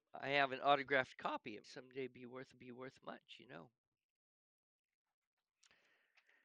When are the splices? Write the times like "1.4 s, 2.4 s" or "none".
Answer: 1.6 s, 2.5 s, 3.5 s

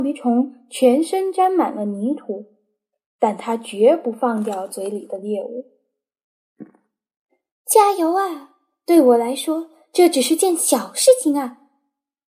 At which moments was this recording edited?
none

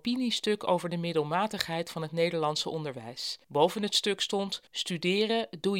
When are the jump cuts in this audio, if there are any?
3.4 s, 4.7 s

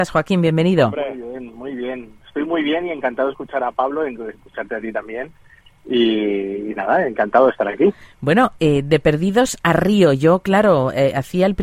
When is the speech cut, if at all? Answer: none

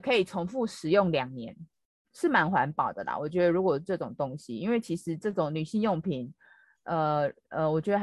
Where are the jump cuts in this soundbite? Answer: none

